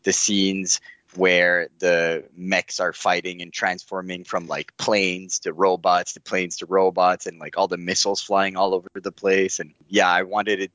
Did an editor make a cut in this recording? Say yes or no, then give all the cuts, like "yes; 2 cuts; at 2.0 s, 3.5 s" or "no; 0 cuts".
no; 0 cuts